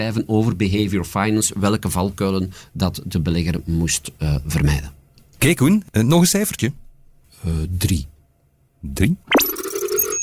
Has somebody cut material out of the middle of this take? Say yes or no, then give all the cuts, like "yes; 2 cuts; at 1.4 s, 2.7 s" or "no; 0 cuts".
no; 0 cuts